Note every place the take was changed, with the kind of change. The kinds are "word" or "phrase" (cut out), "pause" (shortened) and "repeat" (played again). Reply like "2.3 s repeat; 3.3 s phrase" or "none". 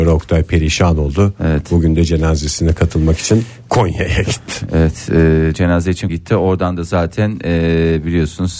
6.1 s word